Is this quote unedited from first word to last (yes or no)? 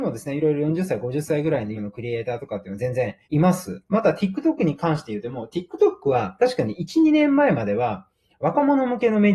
no